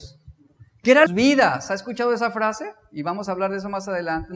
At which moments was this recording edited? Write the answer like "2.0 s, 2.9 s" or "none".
1.1 s